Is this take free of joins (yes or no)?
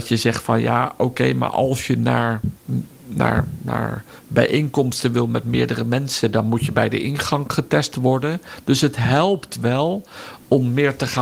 yes